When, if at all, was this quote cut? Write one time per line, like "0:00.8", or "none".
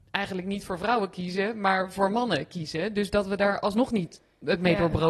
none